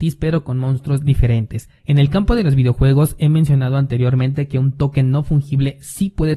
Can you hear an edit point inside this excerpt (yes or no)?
yes